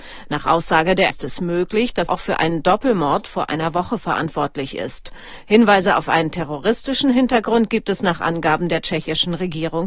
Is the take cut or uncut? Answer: cut